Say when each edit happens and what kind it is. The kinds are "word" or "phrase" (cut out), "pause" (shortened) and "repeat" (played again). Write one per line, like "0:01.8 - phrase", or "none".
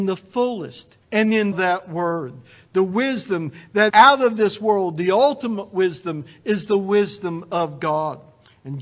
0:01.0 - pause
0:01.5 - phrase
0:03.9 - word